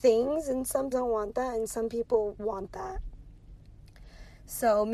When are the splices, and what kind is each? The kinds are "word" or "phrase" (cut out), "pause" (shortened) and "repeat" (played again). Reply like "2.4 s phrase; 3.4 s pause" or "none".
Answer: 0.9 s word